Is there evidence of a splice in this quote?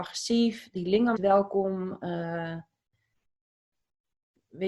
yes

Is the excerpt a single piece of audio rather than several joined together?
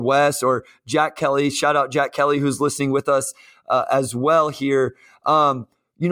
yes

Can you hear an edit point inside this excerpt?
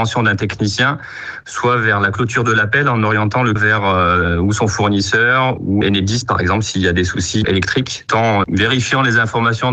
yes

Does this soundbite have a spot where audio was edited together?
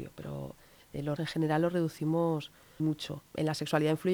yes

